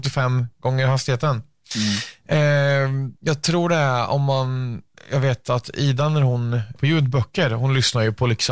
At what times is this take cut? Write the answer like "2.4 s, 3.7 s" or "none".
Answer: 5.0 s, 6.8 s